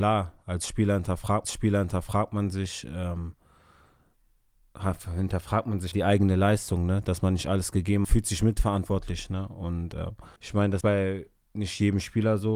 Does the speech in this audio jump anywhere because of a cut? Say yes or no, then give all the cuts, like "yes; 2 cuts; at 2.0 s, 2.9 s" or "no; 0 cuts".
yes; 5 cuts; at 1.4 s, 5.9 s, 8.0 s, 10.4 s, 10.8 s